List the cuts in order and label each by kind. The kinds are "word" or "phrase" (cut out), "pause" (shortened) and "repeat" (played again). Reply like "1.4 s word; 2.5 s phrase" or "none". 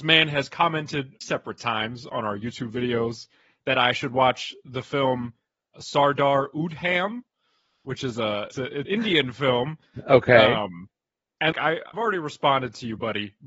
1.2 s word; 5.7 s word; 8.5 s word; 8.8 s word; 11.5 s word; 11.9 s word